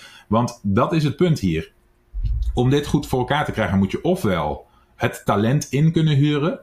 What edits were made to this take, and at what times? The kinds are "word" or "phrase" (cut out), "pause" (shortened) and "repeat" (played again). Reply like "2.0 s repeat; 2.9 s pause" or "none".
none